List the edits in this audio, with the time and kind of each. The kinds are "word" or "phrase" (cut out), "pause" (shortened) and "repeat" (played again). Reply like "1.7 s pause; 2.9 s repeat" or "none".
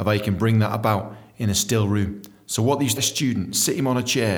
3.0 s phrase